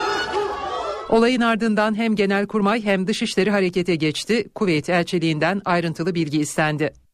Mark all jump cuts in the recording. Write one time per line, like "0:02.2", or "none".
none